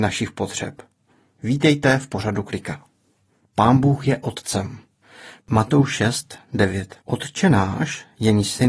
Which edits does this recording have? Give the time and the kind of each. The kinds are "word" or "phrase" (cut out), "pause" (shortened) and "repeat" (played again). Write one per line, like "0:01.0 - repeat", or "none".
0:07.0 - pause